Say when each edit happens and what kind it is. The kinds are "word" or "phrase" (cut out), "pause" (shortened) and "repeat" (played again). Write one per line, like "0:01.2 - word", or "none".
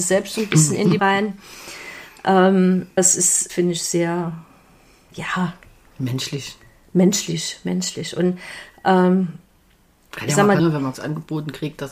0:01.0 - word
0:03.0 - word
0:03.5 - word
0:10.6 - word
0:10.9 - word